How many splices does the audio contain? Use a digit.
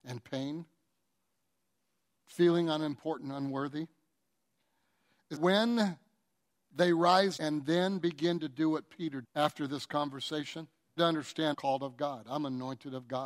5